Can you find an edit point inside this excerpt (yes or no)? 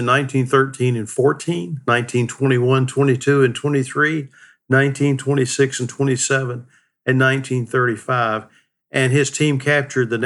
no